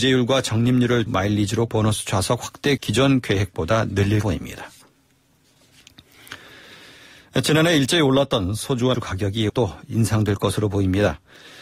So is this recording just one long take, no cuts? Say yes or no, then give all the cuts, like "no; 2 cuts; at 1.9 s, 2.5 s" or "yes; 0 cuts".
no; 6 cuts; at 1.1 s, 1.7 s, 2.8 s, 4.2 s, 8.9 s, 9.5 s